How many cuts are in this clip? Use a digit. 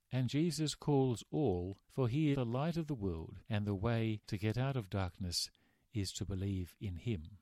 4